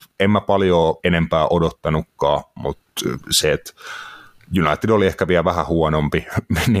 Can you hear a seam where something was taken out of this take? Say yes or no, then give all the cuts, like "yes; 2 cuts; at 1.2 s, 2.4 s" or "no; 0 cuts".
yes; 2 cuts; at 1.0 s, 3.2 s